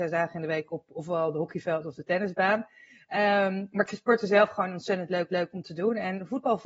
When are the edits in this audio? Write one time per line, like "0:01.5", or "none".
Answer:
0:05.3